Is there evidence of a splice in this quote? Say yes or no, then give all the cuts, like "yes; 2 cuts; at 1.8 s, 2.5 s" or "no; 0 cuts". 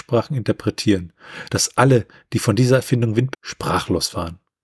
yes; 1 cut; at 3.3 s